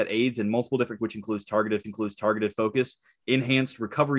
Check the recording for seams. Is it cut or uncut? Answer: cut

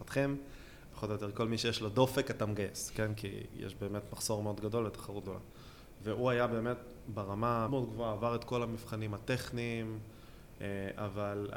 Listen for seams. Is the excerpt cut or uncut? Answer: cut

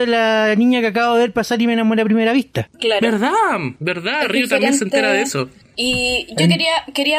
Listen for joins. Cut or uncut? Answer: uncut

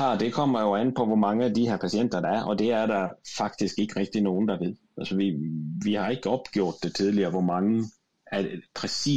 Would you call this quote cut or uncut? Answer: uncut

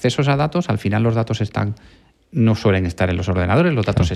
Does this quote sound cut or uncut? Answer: uncut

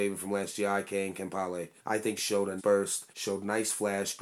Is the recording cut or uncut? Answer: cut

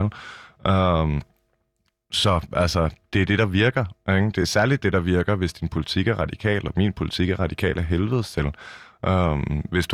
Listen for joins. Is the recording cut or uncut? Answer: uncut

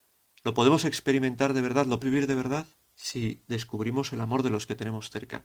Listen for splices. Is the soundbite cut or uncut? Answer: cut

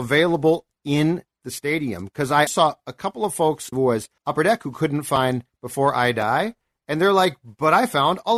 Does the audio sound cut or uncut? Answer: cut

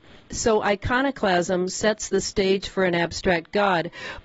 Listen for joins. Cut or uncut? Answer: uncut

